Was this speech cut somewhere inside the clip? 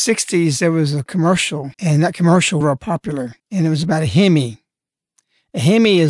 yes; 3 cuts; at 1.7 s, 2.6 s, 3.4 s

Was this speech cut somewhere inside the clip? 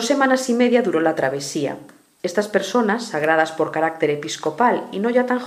no; 0 cuts

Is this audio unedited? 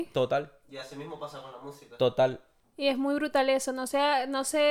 yes; 0 cuts

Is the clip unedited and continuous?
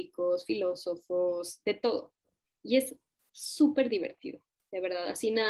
yes; 0 cuts

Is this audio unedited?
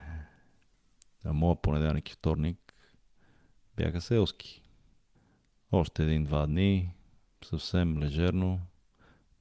yes; 0 cuts

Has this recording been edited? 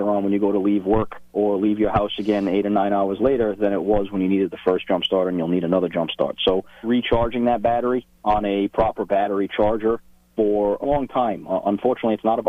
yes; 4 cuts; at 1.3 s, 6.8 s, 8.1 s, 10.8 s

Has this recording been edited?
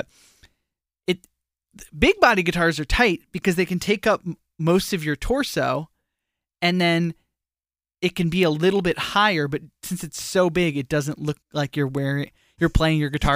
yes; 1 cut; at 11.4 s

